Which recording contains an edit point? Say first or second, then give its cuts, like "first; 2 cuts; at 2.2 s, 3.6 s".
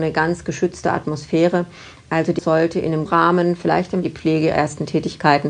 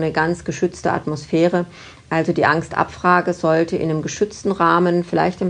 first; 4 cuts; at 2.4 s, 3.1 s, 4.0 s, 4.5 s